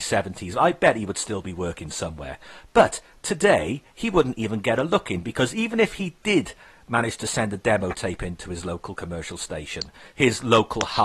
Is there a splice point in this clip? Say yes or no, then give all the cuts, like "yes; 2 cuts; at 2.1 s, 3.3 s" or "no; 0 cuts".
no; 0 cuts